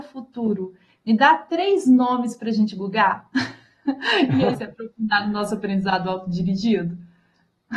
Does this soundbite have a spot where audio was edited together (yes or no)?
yes